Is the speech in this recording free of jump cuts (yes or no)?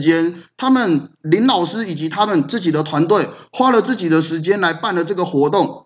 yes